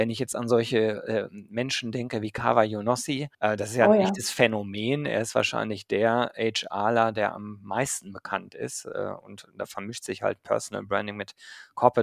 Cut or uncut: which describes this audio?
cut